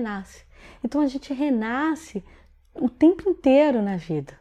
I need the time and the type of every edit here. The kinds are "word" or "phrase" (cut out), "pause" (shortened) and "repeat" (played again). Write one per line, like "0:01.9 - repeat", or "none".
none